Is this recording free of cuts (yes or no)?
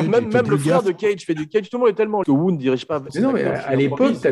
no